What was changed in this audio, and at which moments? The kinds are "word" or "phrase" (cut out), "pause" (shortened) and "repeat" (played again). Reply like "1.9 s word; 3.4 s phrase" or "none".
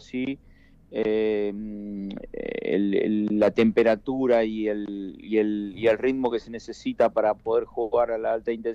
none